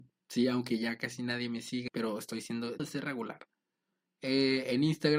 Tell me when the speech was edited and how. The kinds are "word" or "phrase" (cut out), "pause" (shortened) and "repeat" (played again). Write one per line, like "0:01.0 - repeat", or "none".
0:01.9 - word
0:02.8 - word